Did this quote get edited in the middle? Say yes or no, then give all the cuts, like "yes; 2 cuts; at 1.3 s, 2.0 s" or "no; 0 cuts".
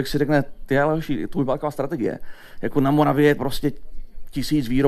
yes; 1 cut; at 3.4 s